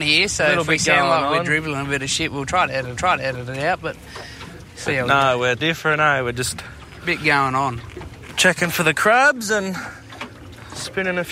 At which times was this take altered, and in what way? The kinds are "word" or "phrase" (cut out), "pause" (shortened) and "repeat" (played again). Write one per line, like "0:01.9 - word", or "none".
0:03.0 - repeat
0:05.6 - word